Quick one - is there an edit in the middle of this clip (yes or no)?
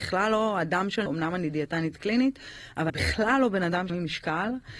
yes